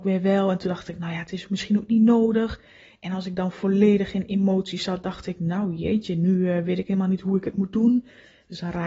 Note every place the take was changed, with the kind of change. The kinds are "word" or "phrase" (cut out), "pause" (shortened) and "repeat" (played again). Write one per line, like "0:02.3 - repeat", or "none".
none

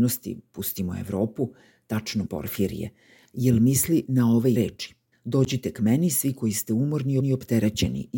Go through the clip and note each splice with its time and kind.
0:02.3 - word
0:04.6 - word
0:05.1 - pause
0:07.2 - repeat

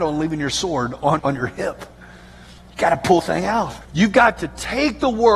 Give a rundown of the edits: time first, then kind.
0:01.2 - word
0:01.9 - pause
0:03.2 - word
0:03.8 - pause

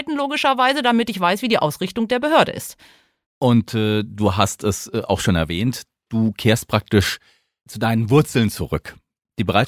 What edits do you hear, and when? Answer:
none

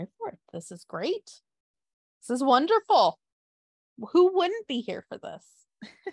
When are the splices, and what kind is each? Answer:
none

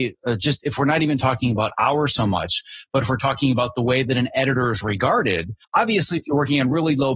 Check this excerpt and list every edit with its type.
0:05.6 - pause

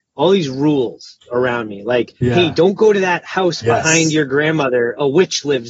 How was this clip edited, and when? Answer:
0:02.2 - pause

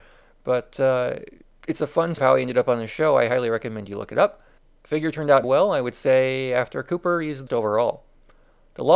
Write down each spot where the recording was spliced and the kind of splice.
0:01.4 - pause
0:02.2 - word
0:04.6 - pause
0:05.4 - word
0:07.5 - phrase

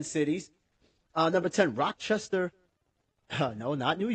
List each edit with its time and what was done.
none

